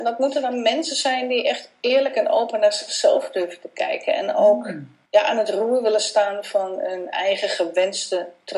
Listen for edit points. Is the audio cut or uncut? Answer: cut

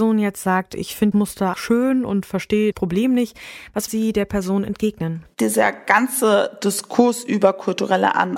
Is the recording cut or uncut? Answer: cut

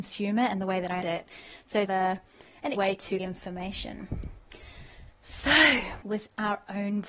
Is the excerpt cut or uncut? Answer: cut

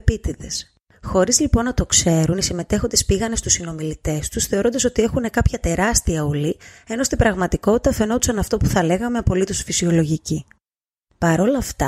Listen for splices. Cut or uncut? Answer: uncut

